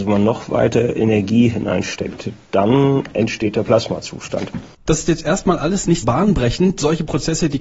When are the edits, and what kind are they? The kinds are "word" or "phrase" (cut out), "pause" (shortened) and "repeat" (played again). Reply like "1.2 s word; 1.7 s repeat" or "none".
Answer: 6.0 s word